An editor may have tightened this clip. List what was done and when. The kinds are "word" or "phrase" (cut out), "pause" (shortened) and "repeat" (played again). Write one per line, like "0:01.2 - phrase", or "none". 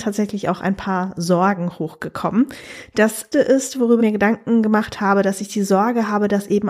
0:03.3 - word
0:04.0 - word